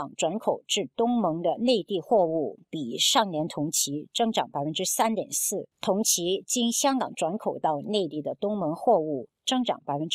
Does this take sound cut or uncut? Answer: cut